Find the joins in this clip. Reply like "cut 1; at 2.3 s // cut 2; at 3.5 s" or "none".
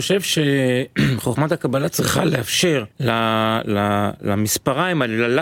cut 1; at 2.9 s

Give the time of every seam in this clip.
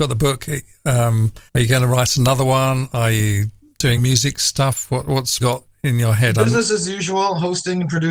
cut 1; at 1.5 s // cut 2; at 4.0 s // cut 3; at 5.4 s

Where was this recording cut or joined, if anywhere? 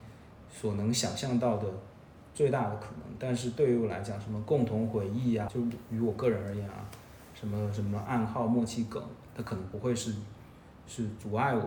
cut 1; at 5.5 s

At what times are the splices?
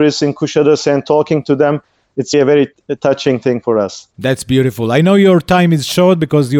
cut 1; at 2.3 s // cut 2; at 4.1 s

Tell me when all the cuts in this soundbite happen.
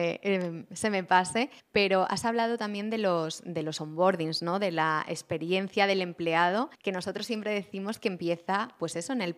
cut 1; at 1.6 s // cut 2; at 6.7 s

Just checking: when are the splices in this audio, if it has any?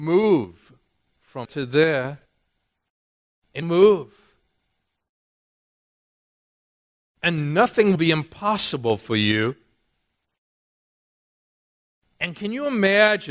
cut 1; at 1.4 s // cut 2; at 2.9 s // cut 3; at 3.6 s // cut 4; at 7.9 s

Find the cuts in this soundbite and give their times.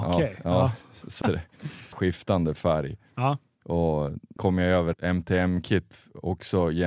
cut 1; at 1.2 s // cut 2; at 1.9 s // cut 3; at 4.4 s // cut 4; at 4.9 s

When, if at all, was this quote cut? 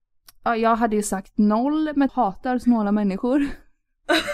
cut 1; at 2.1 s

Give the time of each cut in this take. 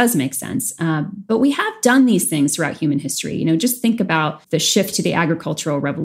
cut 1; at 4.4 s

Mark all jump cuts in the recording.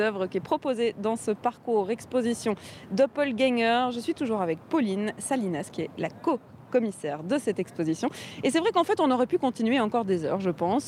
none

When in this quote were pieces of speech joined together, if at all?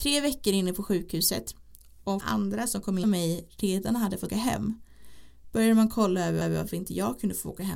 cut 1; at 2.2 s // cut 2; at 3.0 s // cut 3; at 4.3 s // cut 4; at 6.4 s

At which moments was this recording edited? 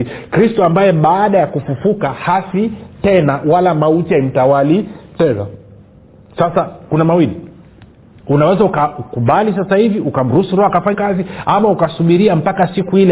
cut 1; at 10.9 s

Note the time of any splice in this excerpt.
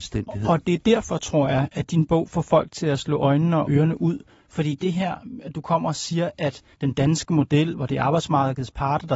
cut 1; at 3.6 s // cut 2; at 6.7 s

